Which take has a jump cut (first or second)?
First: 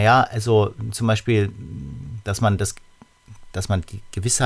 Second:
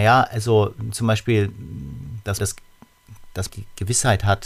second